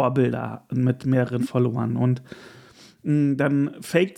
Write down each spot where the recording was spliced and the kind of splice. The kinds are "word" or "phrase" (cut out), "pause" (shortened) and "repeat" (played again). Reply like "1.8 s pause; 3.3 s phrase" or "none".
1.4 s word